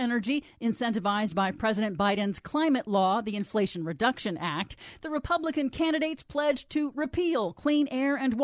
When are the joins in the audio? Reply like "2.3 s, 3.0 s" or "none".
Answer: none